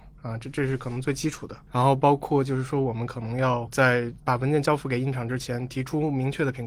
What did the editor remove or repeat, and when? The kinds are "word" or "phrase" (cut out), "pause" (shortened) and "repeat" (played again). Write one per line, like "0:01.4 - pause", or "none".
0:04.2 - pause